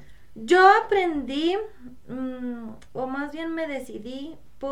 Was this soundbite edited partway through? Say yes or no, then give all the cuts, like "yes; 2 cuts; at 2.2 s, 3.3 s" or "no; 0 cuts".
no; 0 cuts